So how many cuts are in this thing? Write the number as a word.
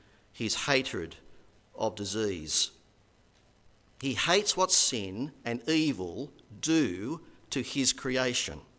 zero